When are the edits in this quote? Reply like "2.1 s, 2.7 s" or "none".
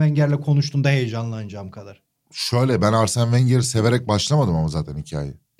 none

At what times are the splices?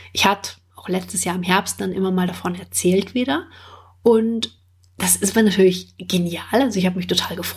none

